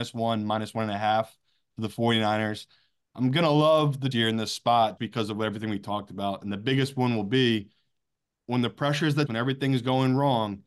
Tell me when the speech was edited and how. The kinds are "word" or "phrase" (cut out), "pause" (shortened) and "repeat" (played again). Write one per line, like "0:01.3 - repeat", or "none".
0:04.1 - word
0:05.0 - word
0:09.3 - word